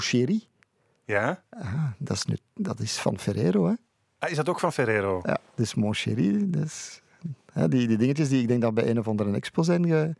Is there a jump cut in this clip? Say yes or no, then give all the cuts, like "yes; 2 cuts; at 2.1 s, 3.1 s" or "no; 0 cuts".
no; 0 cuts